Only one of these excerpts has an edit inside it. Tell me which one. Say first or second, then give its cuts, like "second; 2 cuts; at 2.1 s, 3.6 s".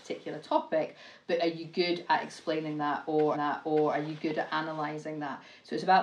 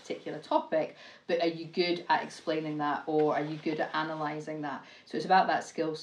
first; 1 cut; at 3.3 s